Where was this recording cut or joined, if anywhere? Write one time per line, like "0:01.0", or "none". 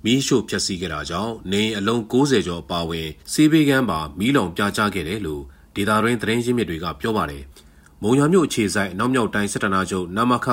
0:03.2
0:07.5